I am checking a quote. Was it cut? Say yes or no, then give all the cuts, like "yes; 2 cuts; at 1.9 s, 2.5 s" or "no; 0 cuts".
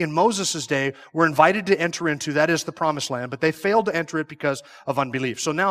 no; 0 cuts